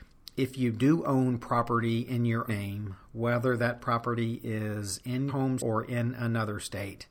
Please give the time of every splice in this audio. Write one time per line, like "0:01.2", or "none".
0:02.5
0:05.3
0:05.6